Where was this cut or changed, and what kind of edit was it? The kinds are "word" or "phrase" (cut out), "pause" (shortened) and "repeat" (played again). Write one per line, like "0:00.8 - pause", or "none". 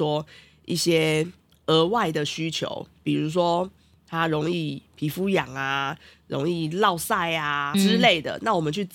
0:07.7 - word